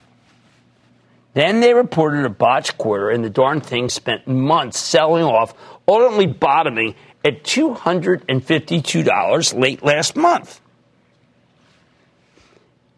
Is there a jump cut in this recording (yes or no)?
no